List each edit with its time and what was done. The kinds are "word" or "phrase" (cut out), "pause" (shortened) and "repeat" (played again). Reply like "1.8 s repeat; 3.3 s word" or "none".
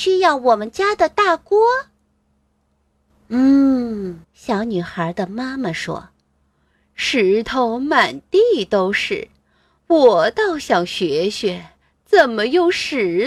4.2 s pause